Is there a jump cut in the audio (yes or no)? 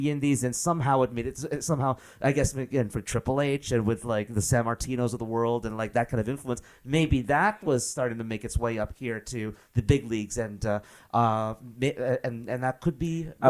no